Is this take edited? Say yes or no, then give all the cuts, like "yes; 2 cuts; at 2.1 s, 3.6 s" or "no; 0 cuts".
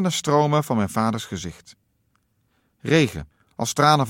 no; 0 cuts